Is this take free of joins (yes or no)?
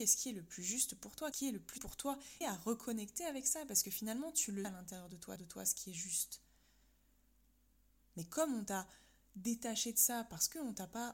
no